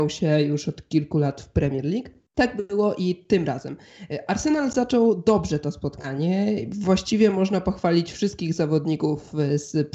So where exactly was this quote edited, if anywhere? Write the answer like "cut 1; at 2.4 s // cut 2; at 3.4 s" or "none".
cut 1; at 2.3 s

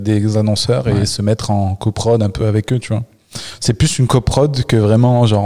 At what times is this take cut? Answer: none

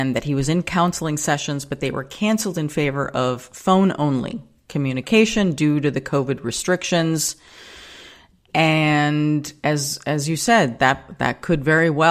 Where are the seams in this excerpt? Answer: none

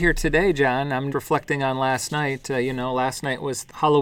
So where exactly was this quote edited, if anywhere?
cut 1; at 1.1 s

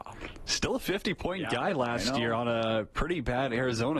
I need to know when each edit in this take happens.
none

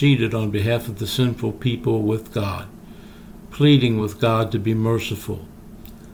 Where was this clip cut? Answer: none

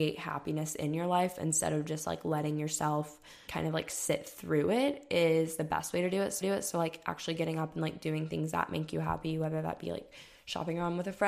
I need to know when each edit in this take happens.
cut 1; at 3.5 s // cut 2; at 6.4 s

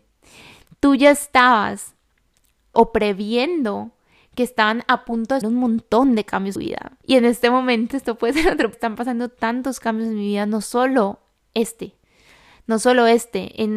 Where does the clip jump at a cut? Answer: cut 1; at 2.7 s // cut 2; at 5.4 s // cut 3; at 6.6 s // cut 4; at 7.0 s // cut 5; at 7.9 s // cut 6; at 8.7 s

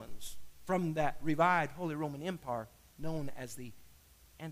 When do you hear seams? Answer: none

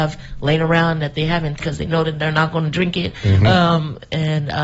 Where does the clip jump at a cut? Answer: cut 1; at 1.6 s

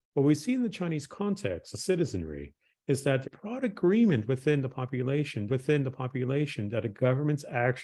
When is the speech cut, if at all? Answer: cut 1; at 1.7 s // cut 2; at 3.2 s // cut 3; at 5.5 s

